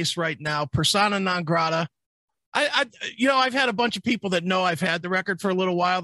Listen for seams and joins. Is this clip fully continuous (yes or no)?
yes